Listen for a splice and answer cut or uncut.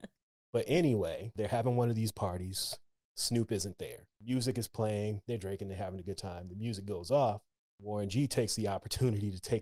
uncut